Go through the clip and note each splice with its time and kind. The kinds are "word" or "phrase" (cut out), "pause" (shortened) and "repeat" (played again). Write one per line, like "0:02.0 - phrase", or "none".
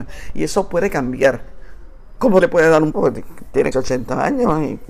0:02.4 - word
0:02.9 - word
0:03.7 - word

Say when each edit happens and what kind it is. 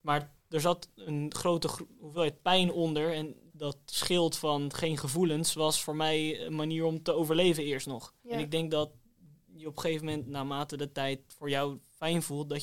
0:03.5 - word
0:08.2 - pause

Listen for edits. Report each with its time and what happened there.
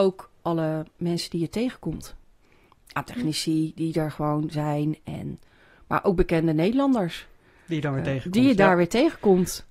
none

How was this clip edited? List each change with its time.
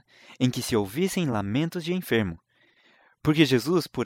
none

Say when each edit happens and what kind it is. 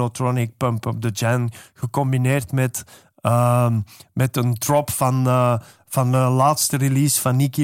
none

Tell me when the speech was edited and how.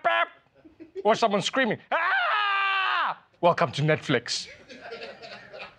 0:01.2 - word
0:03.3 - pause

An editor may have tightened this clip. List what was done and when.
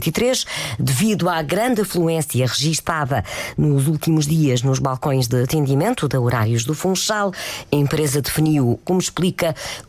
0:08.8 - phrase

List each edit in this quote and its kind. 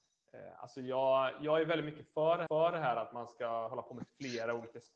0:02.5 - repeat

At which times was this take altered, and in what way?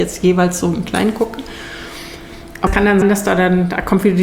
0:02.7 - word
0:03.0 - word

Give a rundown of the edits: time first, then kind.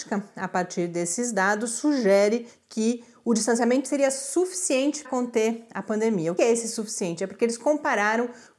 0:03.9 - word
0:05.0 - word
0:06.4 - word

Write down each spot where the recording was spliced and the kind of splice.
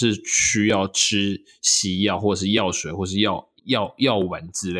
0:03.6 - pause

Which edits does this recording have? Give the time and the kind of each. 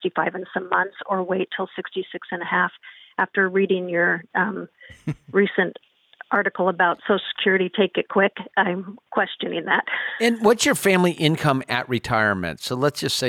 none

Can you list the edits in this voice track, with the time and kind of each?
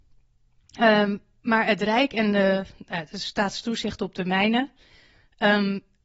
none

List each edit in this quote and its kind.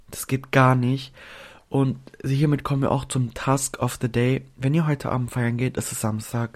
none

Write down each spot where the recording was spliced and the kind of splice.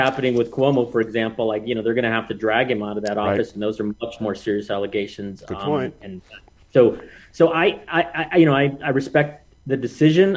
none

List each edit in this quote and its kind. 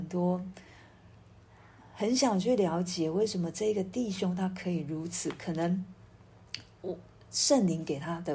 none

